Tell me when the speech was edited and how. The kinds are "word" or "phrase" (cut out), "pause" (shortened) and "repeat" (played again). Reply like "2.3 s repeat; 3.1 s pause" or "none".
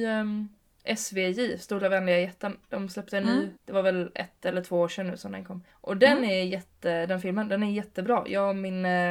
3.6 s pause; 5.7 s pause